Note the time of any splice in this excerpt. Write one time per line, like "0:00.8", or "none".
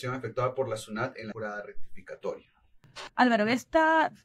0:01.3